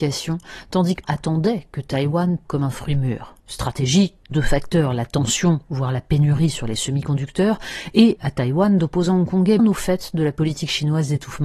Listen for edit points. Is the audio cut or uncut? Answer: cut